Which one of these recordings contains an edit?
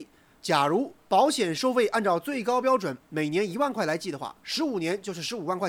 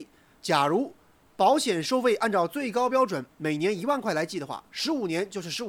first; 1 cut; at 1.0 s

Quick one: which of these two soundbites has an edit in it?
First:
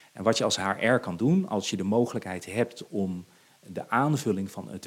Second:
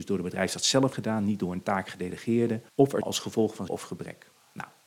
second; 4 cuts; at 0.9 s, 2.7 s, 3.0 s, 3.7 s

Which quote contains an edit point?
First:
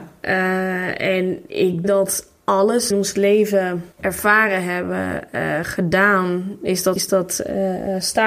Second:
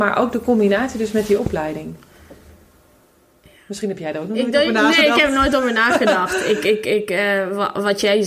first; 4 cuts; at 1.8 s, 2.9 s, 3.9 s, 7.0 s

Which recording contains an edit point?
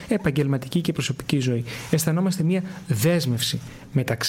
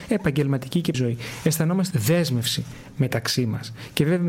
second; 2 cuts; at 0.9 s, 1.9 s

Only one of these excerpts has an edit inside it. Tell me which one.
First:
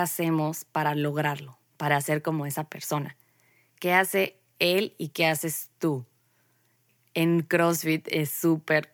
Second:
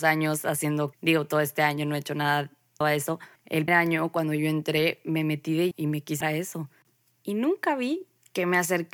second; 6 cuts; at 0.9 s, 2.8 s, 3.4 s, 3.7 s, 5.7 s, 6.2 s

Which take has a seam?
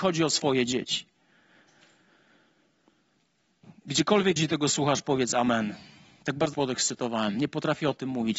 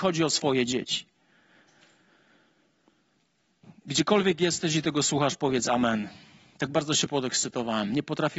first; 2 cuts; at 4.4 s, 6.5 s

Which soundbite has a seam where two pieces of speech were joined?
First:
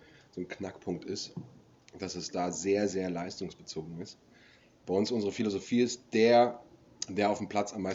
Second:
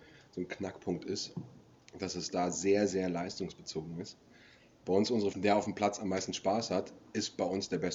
second; 1 cut; at 5.3 s

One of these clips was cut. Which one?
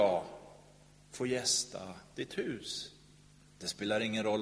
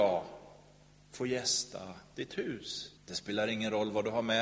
second; 1 cut; at 3.0 s

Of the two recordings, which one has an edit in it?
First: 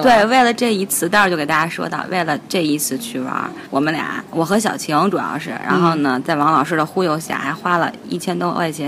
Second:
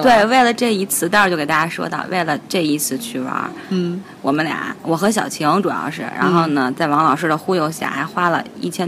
first; 1 cut; at 3.7 s

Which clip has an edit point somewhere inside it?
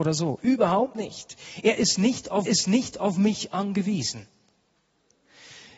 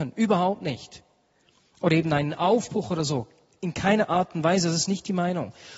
first; 1 cut; at 2.5 s

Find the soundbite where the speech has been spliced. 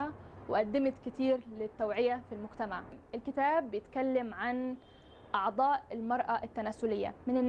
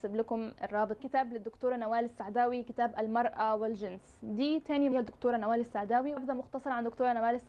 second; 3 cuts; at 1.0 s, 4.9 s, 6.2 s

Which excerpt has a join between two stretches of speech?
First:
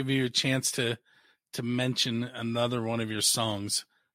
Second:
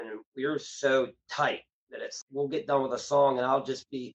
second; 1 cut; at 2.2 s

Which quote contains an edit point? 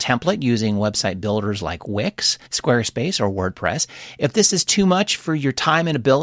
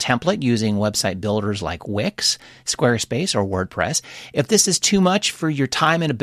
first; 1 cut; at 2.5 s

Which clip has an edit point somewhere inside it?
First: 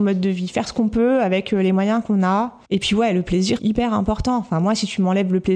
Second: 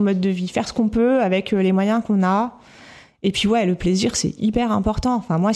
first; 2 cuts; at 2.6 s, 3.6 s

